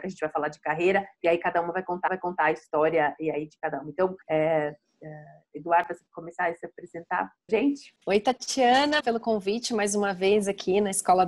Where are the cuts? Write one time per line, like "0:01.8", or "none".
0:02.1
0:04.2
0:06.1
0:07.5
0:08.0
0:09.0